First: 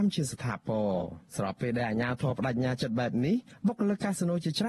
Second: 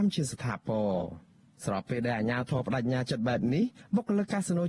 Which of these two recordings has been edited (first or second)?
first